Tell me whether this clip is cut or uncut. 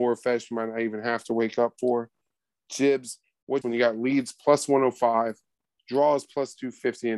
cut